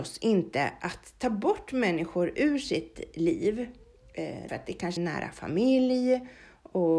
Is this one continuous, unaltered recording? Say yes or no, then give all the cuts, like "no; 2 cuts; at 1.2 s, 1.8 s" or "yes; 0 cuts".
no; 2 cuts; at 4.5 s, 5.0 s